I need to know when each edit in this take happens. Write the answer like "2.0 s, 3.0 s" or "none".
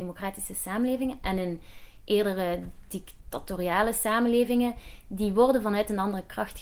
none